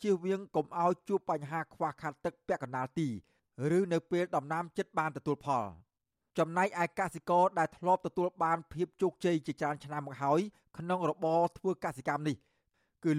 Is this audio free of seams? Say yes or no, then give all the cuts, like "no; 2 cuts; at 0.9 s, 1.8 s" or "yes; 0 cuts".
yes; 0 cuts